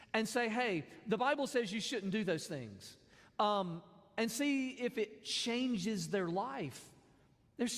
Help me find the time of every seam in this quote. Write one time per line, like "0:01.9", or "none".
none